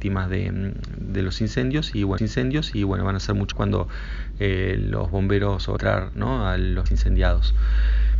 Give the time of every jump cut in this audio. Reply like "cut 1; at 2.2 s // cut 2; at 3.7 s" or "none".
cut 1; at 2.2 s // cut 2; at 3.5 s // cut 3; at 5.8 s // cut 4; at 6.9 s